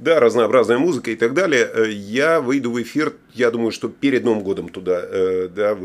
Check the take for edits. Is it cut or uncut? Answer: cut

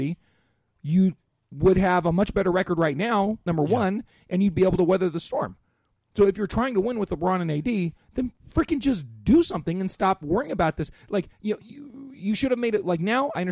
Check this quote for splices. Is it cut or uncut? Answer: uncut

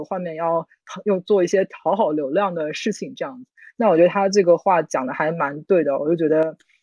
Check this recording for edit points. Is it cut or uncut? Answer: uncut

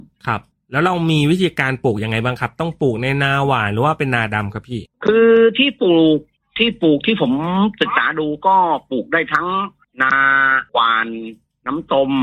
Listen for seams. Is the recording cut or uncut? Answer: cut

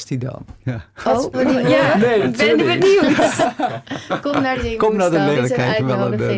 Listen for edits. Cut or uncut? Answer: cut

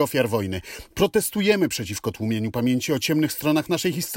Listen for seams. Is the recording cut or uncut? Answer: uncut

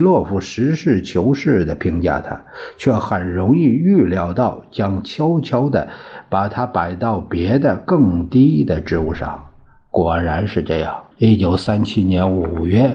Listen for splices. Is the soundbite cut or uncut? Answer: cut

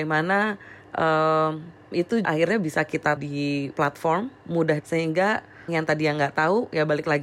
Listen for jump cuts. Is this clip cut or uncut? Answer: cut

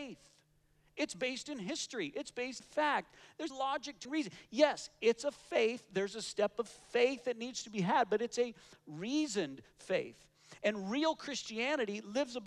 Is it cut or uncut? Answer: cut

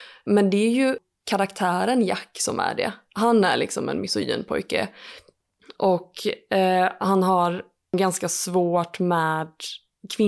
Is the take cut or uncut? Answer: uncut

